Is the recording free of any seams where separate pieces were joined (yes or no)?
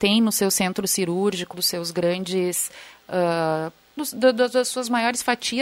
no